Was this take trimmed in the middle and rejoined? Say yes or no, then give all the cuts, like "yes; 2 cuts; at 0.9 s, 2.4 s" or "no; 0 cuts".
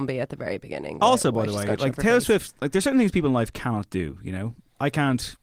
no; 0 cuts